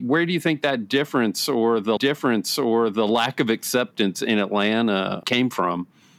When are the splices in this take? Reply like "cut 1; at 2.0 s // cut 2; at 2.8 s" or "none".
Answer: cut 1; at 2.0 s // cut 2; at 5.2 s